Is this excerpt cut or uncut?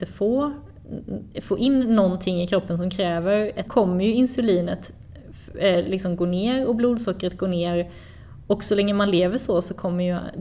cut